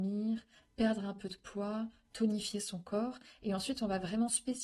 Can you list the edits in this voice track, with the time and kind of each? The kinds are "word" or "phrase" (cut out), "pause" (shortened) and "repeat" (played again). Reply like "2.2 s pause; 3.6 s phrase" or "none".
none